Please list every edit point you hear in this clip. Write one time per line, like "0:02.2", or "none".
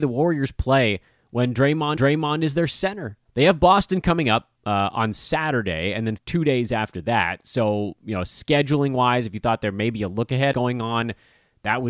0:02.0
0:03.2
0:04.6
0:06.2
0:10.5